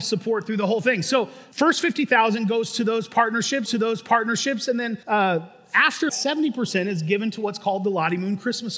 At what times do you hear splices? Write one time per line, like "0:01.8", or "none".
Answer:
0:01.5
0:03.7
0:05.0
0:06.1